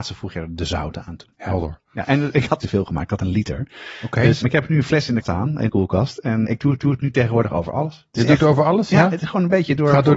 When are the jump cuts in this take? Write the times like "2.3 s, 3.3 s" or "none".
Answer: 1.3 s, 2.6 s, 4.4 s, 5.2 s, 5.7 s, 6.4 s, 6.8 s